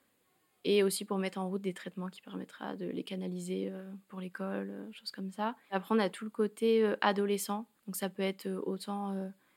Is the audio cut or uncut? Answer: cut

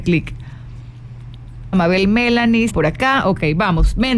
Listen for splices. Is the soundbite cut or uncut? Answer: cut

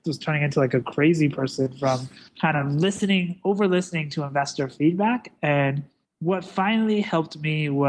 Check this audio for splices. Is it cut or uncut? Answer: cut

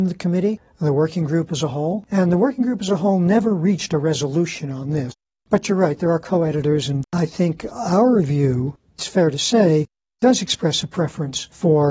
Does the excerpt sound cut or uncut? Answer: uncut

